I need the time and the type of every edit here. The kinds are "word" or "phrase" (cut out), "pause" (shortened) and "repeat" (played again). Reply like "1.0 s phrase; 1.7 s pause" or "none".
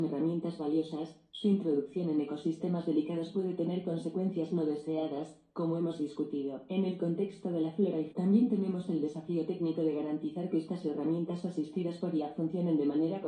8.1 s word